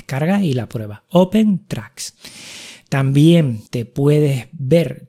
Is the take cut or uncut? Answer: cut